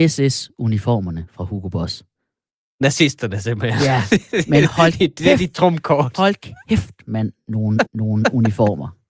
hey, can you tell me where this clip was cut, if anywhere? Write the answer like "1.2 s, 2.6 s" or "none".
4.9 s, 7.8 s